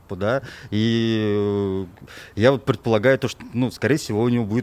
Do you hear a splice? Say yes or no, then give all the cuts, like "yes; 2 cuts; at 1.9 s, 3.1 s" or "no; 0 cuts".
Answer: no; 0 cuts